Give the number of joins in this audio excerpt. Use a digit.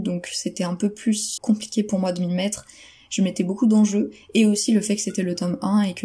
1